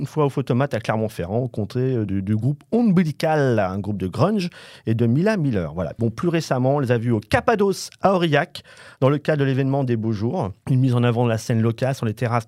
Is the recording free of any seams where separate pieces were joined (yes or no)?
yes